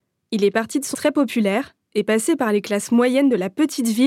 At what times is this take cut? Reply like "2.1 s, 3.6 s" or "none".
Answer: 0.9 s